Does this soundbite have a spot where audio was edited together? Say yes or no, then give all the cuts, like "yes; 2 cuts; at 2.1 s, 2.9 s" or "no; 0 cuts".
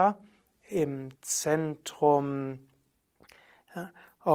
yes; 1 cut; at 1.2 s